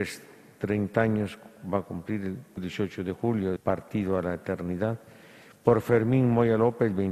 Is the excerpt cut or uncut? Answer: cut